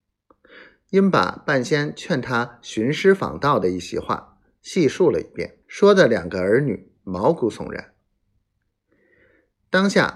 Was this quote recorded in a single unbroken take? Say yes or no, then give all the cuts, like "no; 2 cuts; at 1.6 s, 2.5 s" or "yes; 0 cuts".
no; 1 cut; at 5.6 s